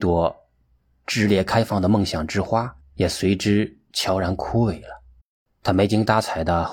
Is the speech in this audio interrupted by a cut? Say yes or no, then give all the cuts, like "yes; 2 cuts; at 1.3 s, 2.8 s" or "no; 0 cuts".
yes; 2 cuts; at 2.8 s, 5.2 s